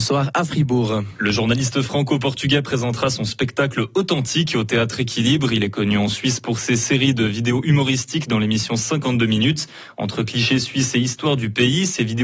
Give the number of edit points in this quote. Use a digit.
0